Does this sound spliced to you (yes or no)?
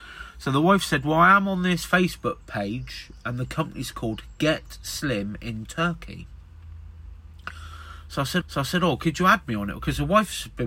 yes